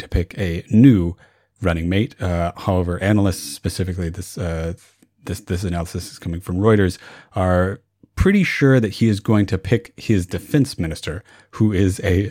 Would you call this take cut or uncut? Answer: uncut